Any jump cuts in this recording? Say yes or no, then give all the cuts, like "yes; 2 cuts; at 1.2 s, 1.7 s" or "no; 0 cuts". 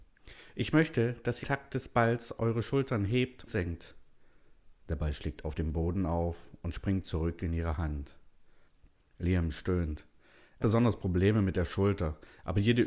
yes; 3 cuts; at 1.4 s, 3.5 s, 10.6 s